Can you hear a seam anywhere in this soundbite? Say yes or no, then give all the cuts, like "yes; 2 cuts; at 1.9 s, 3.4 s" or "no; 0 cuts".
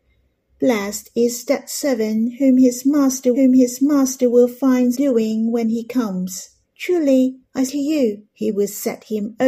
yes; 5 cuts; at 3.3 s, 4.9 s, 6.6 s, 7.7 s, 8.3 s